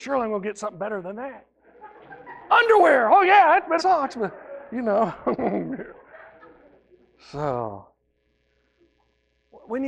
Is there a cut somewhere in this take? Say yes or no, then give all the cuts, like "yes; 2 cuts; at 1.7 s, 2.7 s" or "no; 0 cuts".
yes; 1 cut; at 3.8 s